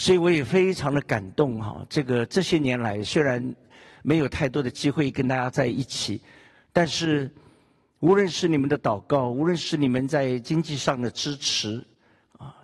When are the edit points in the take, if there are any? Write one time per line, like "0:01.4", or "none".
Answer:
none